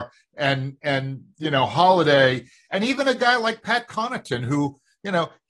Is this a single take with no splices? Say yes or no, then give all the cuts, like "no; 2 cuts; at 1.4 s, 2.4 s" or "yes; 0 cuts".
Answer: yes; 0 cuts